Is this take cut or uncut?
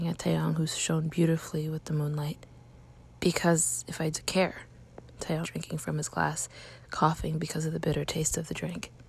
cut